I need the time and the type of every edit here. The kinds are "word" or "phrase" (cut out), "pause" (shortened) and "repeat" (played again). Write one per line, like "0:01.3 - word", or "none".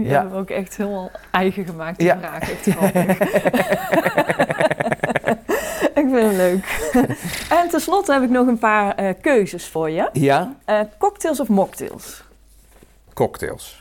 none